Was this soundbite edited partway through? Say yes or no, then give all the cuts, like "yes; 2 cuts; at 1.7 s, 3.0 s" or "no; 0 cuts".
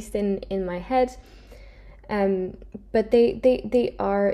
no; 0 cuts